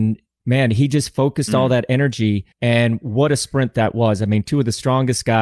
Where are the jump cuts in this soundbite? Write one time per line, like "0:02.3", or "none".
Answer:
0:02.5

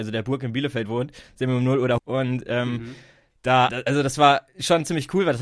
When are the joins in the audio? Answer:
0:02.0
0:03.7

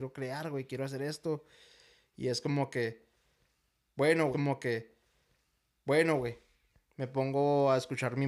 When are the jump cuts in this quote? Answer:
0:04.3

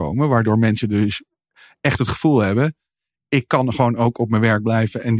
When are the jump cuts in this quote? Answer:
none

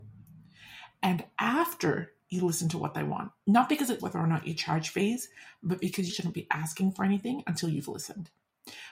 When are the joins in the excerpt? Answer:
0:03.4
0:04.0
0:06.1

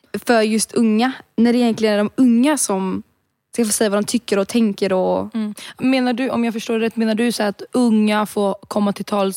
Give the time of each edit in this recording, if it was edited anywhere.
0:05.8

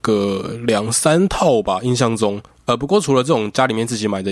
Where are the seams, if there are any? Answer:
0:02.5

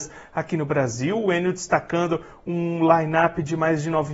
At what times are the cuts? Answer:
none

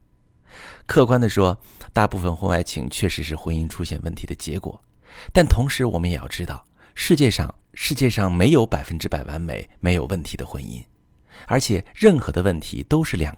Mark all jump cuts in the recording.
none

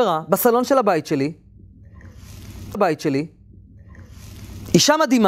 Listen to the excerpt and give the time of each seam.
0:02.7

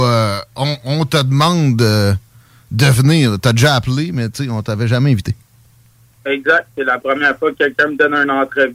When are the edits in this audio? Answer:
none

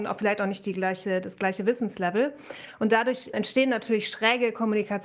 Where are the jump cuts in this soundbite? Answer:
none

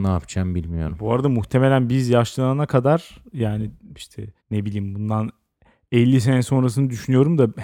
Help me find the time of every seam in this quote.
0:04.4

